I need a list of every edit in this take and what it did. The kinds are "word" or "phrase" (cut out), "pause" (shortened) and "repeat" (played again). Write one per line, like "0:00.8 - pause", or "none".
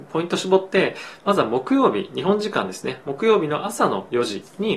none